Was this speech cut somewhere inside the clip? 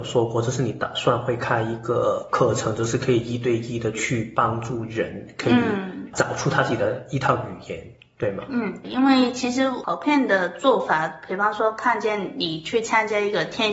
yes; 1 cut; at 8.8 s

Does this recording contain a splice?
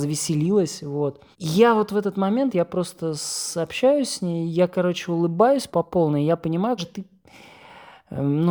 yes; 3 cuts; at 1.3 s, 5.7 s, 6.8 s

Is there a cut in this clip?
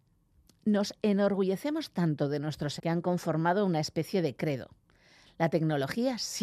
yes; 1 cut; at 2.8 s

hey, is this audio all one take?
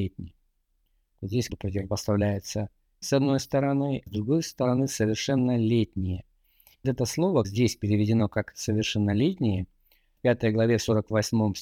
no; 6 cuts; at 1.5 s, 3.0 s, 4.1 s, 6.8 s, 7.4 s, 10.2 s

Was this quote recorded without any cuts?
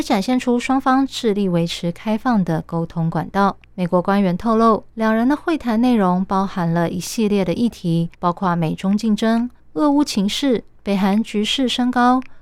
no; 5 cuts; at 3.6 s, 4.9 s, 8.1 s, 9.6 s, 10.8 s

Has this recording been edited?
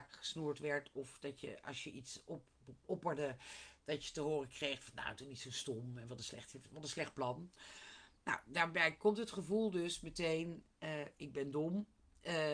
no; 0 cuts

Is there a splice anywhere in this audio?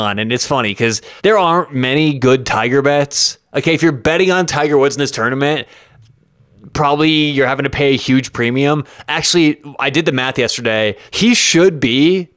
yes; 2 cuts; at 1.2 s, 11.1 s

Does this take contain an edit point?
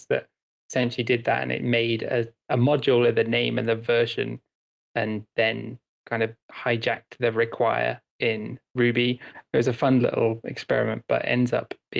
yes; 1 cut; at 6.4 s

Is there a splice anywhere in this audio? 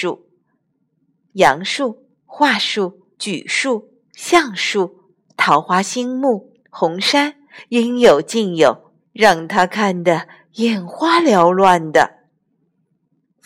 yes; 5 cuts; at 2.2 s, 3.1 s, 5.3 s, 6.6 s, 9.0 s

